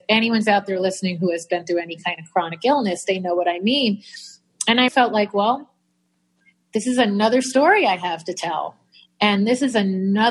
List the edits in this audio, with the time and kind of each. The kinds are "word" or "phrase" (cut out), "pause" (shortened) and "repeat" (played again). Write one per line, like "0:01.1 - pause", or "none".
0:04.9 - word